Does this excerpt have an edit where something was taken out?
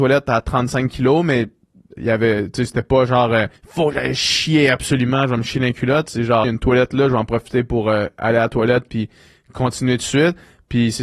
yes; 3 cuts; at 2.0 s, 3.6 s, 6.4 s

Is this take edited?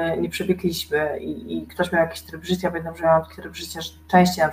no; 0 cuts

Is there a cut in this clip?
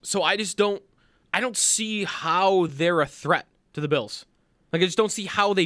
no; 0 cuts

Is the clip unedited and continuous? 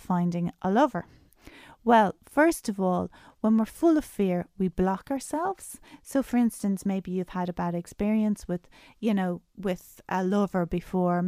yes; 0 cuts

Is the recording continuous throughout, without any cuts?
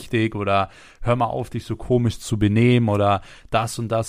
yes; 0 cuts

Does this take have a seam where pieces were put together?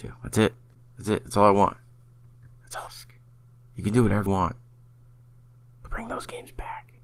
yes; 3 cuts; at 2.9 s, 4.3 s, 5.9 s

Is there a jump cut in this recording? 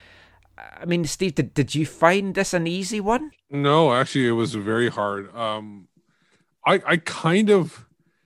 no; 0 cuts

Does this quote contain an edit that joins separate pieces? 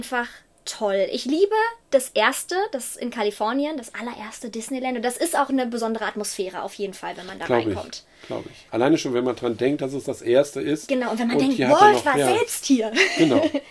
yes; 2 cuts; at 1.8 s, 8.7 s

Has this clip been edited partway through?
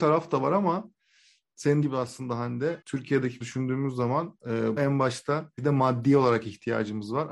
yes; 5 cuts; at 1.8 s, 2.8 s, 3.4 s, 4.8 s, 5.6 s

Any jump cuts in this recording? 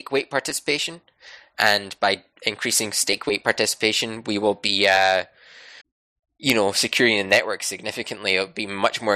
yes; 1 cut; at 5.8 s

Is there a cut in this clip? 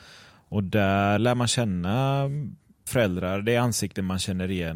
yes; 2 cuts; at 1.2 s, 2.9 s

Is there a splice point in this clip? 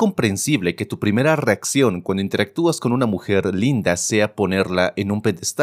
no; 0 cuts

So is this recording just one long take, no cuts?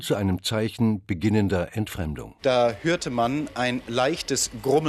yes; 0 cuts

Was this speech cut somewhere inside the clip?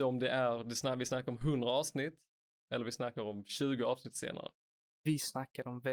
no; 0 cuts

